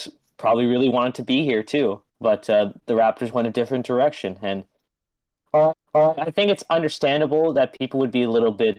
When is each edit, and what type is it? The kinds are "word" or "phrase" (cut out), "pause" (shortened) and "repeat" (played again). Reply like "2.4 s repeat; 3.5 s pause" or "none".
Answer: 2.1 s pause; 5.7 s repeat